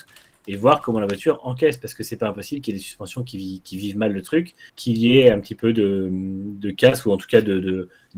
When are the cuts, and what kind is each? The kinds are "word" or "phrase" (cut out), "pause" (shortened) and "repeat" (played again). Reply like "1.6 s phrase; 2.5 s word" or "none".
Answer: 4.7 s pause